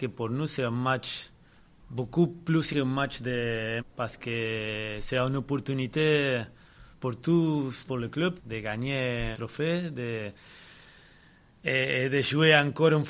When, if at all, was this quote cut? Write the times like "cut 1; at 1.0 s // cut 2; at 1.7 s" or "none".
cut 1; at 1.6 s // cut 2; at 2.7 s // cut 3; at 3.8 s // cut 4; at 6.9 s // cut 5; at 7.9 s // cut 6; at 8.4 s // cut 7; at 9.3 s